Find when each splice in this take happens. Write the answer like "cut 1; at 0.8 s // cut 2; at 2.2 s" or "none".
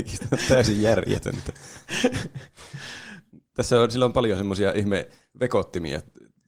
none